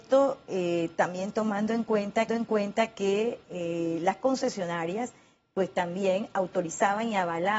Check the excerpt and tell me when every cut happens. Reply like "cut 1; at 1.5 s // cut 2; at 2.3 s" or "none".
cut 1; at 2.3 s